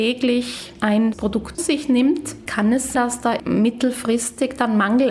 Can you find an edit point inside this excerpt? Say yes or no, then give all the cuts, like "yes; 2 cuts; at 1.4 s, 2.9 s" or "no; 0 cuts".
yes; 4 cuts; at 1.1 s, 1.6 s, 2.5 s, 2.9 s